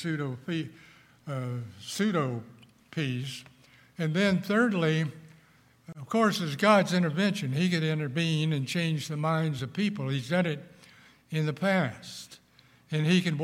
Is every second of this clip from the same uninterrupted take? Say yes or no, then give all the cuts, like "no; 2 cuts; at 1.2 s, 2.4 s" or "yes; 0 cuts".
yes; 0 cuts